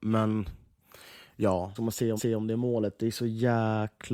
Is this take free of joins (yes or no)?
no